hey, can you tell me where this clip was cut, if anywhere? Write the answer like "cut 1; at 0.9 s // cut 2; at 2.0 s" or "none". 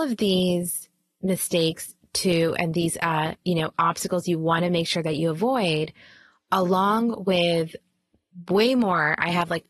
none

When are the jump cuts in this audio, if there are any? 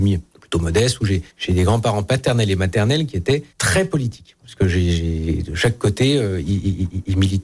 cut 1; at 1.3 s // cut 2; at 3.5 s

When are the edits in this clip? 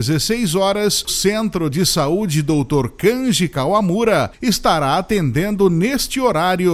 cut 1; at 1.1 s

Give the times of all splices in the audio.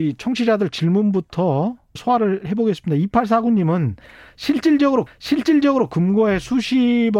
cut 1; at 2.0 s // cut 2; at 5.1 s

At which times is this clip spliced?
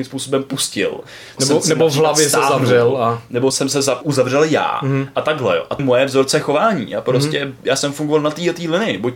cut 1; at 1.4 s // cut 2; at 3.5 s // cut 3; at 4.0 s // cut 4; at 5.8 s

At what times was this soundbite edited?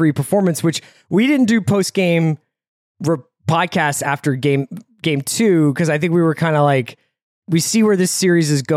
none

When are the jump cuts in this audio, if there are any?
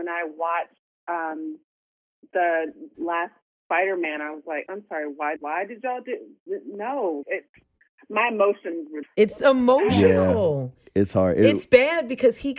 cut 1; at 4.7 s // cut 2; at 5.4 s // cut 3; at 7.2 s // cut 4; at 9.0 s

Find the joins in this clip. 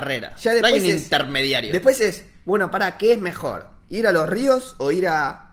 none

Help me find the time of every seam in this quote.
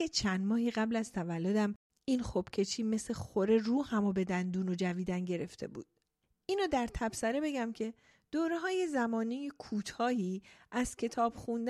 none

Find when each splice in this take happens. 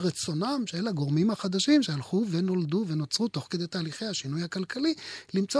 none

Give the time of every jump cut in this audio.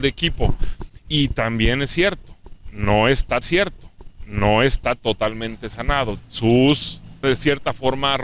cut 1; at 3.4 s // cut 2; at 6.2 s // cut 3; at 7.2 s

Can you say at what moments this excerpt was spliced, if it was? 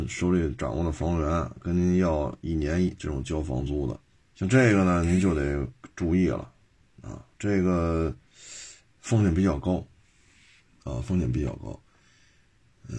cut 1; at 3.0 s // cut 2; at 4.1 s // cut 3; at 7.3 s

